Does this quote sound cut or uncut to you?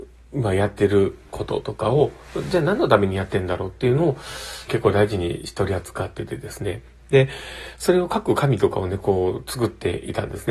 cut